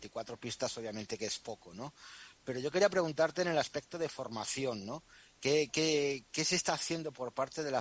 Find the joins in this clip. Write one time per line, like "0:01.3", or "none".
none